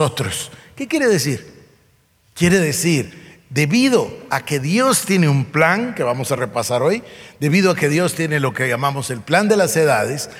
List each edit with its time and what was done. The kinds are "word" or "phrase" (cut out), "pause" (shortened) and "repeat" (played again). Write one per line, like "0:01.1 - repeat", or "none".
none